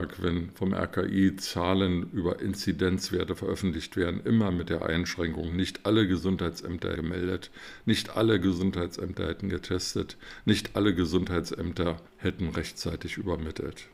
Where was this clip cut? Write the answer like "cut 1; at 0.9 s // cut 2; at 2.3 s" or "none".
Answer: cut 1; at 7.0 s // cut 2; at 12.1 s